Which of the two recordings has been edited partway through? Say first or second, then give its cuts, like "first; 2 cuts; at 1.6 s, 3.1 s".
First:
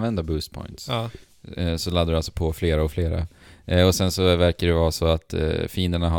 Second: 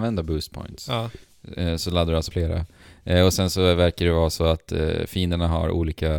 second; 1 cut; at 2.3 s